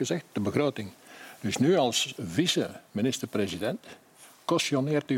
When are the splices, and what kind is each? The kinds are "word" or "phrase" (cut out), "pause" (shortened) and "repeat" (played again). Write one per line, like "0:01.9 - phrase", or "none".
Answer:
none